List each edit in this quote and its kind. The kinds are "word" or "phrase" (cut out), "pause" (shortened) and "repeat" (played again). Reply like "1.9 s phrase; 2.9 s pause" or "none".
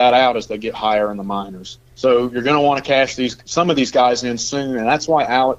1.9 s pause